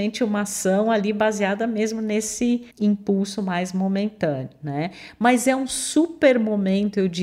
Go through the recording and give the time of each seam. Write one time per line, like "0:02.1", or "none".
0:02.7